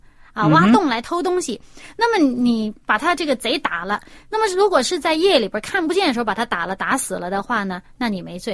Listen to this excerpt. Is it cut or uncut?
uncut